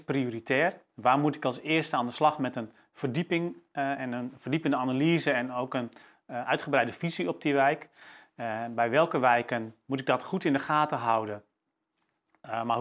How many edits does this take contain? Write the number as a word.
zero